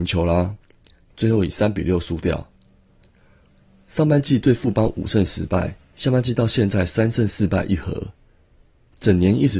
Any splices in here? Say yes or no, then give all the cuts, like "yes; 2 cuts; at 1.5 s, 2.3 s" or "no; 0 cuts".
yes; 1 cut; at 5.8 s